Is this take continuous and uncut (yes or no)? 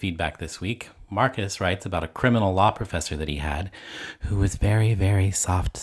yes